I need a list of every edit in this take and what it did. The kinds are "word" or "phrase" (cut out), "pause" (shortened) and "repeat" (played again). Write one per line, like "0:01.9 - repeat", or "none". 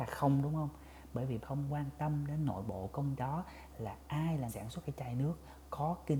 0:01.4 - word
0:03.2 - word
0:04.5 - word
0:04.8 - word